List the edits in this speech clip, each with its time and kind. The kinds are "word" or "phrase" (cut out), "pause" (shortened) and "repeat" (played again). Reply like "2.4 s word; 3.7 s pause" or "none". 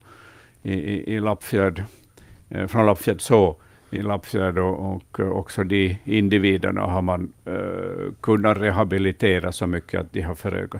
3.9 s word; 7.4 s pause